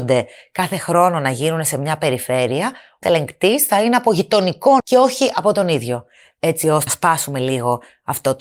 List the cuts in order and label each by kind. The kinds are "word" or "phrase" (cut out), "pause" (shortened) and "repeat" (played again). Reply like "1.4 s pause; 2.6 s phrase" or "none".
3.0 s word; 4.8 s word; 6.9 s word